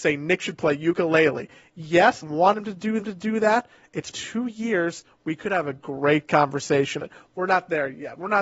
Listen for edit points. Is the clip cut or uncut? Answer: cut